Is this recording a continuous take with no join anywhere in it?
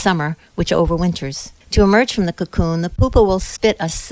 no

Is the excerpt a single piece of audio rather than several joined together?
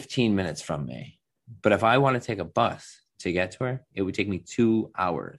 yes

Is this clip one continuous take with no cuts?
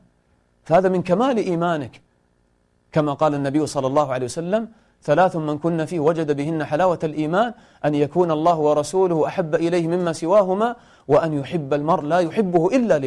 yes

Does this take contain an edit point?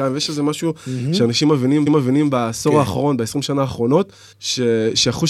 yes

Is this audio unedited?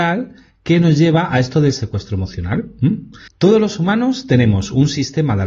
yes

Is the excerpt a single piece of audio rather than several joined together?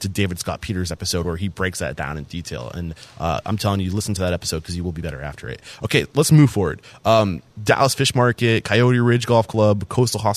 no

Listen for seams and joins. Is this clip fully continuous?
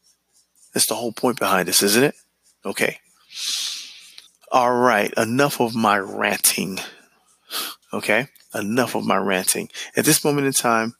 no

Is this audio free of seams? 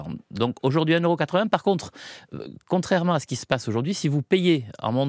yes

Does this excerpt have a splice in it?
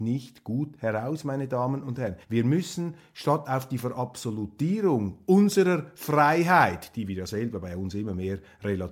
yes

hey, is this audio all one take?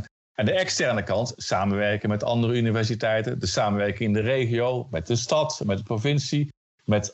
yes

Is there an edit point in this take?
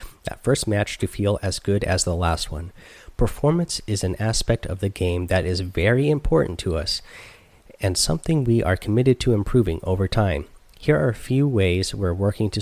no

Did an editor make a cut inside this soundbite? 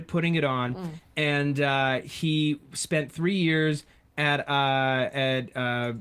no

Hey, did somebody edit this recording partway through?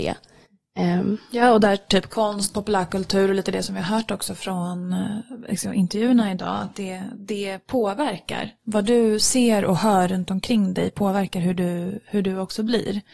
yes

